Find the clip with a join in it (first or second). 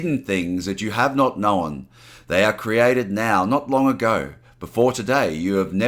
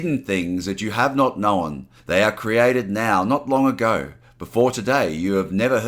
second